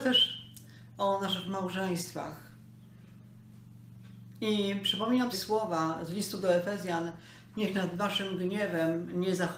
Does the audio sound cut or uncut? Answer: cut